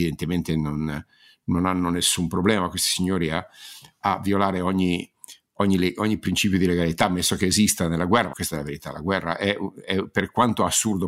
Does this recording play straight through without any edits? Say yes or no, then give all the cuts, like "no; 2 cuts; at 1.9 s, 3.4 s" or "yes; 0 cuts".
no; 1 cut; at 8.3 s